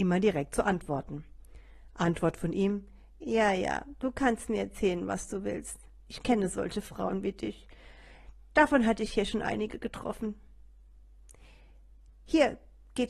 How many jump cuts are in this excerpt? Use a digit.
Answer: 0